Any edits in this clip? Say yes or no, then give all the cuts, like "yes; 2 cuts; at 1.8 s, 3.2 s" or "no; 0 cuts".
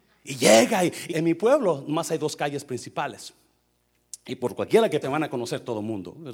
yes; 2 cuts; at 1.1 s, 5.0 s